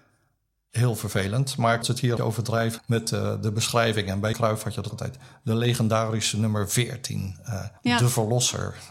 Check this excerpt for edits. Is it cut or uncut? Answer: cut